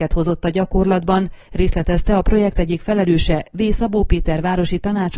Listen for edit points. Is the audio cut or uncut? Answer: uncut